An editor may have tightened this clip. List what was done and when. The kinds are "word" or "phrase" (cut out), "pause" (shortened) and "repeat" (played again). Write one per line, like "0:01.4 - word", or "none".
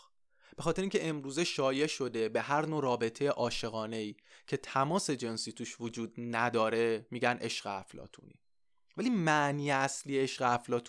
none